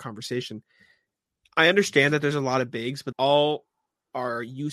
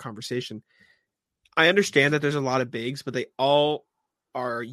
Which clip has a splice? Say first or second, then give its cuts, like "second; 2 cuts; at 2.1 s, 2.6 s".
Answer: first; 1 cut; at 3.1 s